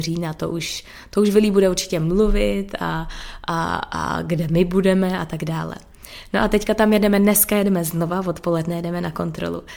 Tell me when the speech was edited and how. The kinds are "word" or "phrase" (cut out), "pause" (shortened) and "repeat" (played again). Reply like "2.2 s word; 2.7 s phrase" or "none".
none